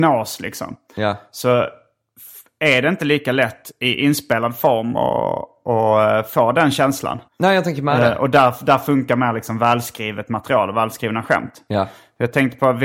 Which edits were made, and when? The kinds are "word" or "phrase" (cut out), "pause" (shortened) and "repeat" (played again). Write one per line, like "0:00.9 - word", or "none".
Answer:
0:07.3 - pause